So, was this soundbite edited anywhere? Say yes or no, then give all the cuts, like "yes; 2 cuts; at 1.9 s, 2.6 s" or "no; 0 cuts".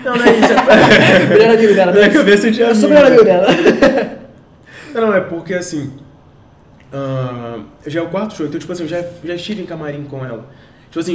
no; 0 cuts